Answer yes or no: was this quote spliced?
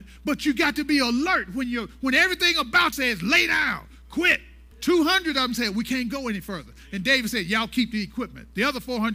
yes